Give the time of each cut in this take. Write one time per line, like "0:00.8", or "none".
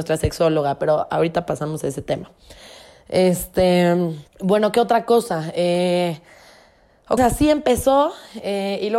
0:04.3
0:07.2